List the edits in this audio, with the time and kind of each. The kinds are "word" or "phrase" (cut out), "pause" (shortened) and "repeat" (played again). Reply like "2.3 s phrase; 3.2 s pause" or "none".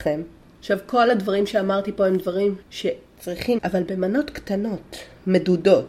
2.6 s pause; 3.6 s word